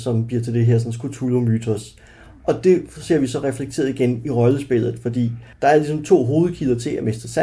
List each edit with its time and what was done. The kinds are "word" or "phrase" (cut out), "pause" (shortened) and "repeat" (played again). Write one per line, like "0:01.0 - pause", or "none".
0:05.5 - pause

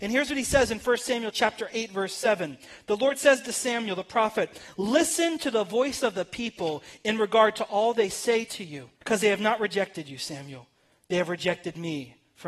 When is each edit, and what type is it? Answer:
0:09.0 - pause

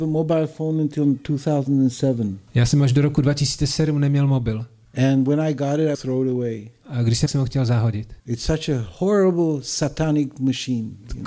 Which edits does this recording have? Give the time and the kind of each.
0:02.5 - pause
0:04.8 - pause
0:05.9 - word
0:07.3 - phrase
0:08.2 - pause

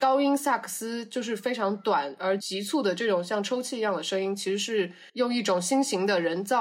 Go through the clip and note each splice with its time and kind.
0:05.1 - pause

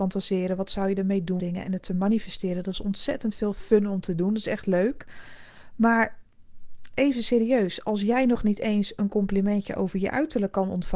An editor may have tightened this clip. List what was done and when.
0:01.4 - phrase

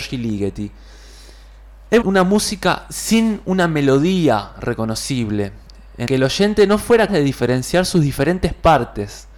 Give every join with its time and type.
0:02.0 - word
0:06.1 - word
0:07.1 - word

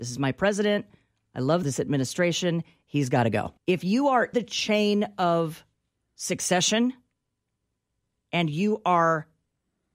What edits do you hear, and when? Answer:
0:01.6 - phrase
0:03.6 - pause
0:04.3 - word

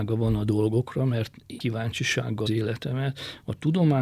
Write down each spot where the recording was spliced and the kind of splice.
0:01.6 - word
0:02.5 - phrase

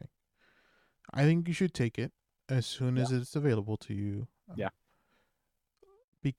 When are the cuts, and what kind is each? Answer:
0:04.6 - word

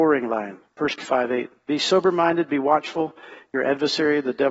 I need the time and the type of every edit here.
0:01.0 - word

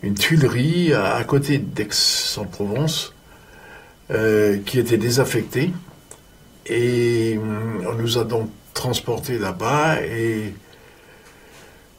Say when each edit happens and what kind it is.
none

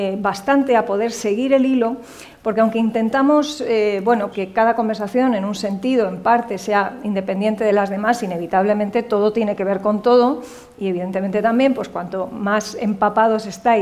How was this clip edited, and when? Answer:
0:04.3 - word

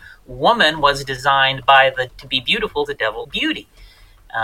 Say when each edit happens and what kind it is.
0:02.1 - word
0:02.9 - word
0:03.2 - word

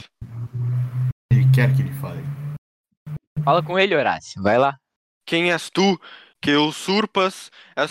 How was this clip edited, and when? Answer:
0:05.0 - pause

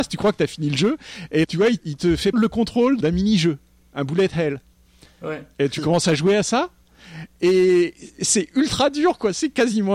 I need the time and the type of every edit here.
0:01.4 - word
0:01.8 - word
0:02.3 - word
0:03.0 - word
0:08.2 - word

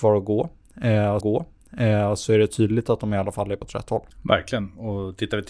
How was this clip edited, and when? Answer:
0:01.2 - repeat
0:03.6 - word
0:04.1 - pause

